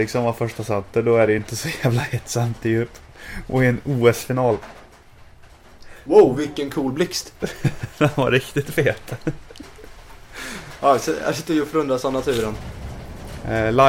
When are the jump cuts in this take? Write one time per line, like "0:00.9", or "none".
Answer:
none